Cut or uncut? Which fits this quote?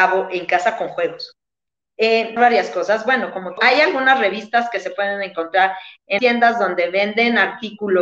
cut